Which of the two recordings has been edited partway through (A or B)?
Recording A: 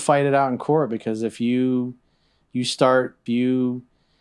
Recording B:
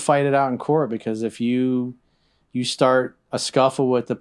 A